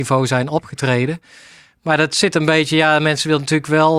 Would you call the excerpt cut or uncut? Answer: uncut